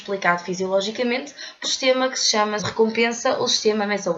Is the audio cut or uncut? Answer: cut